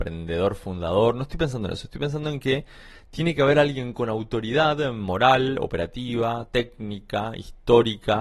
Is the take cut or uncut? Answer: uncut